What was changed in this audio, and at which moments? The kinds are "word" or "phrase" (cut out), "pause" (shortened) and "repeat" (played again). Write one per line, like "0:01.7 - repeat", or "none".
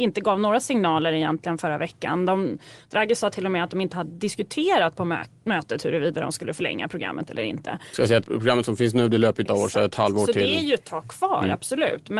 0:08.2 - word
0:09.5 - phrase